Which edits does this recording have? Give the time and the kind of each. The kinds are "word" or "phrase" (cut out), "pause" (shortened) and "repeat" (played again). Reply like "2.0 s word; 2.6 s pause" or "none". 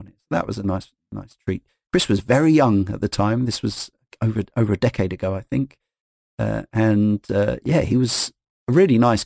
none